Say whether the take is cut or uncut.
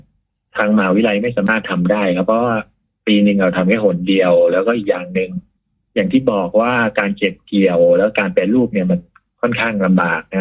uncut